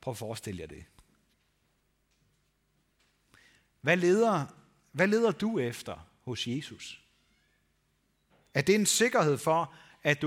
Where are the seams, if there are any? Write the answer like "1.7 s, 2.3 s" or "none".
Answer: none